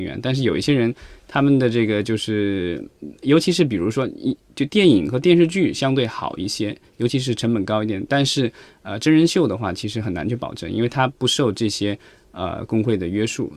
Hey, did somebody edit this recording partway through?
no; 0 cuts

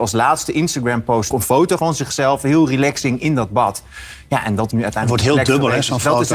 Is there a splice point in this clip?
yes; 3 cuts; at 1.3 s, 1.8 s, 4.7 s

